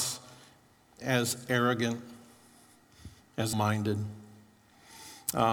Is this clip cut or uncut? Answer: cut